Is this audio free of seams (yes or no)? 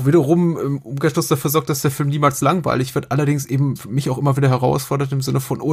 yes